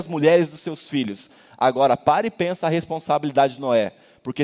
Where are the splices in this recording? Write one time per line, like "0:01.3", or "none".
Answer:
none